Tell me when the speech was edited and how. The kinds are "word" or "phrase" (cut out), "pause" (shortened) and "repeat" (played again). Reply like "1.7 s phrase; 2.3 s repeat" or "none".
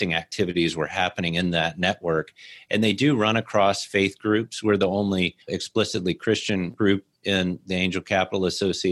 5.4 s pause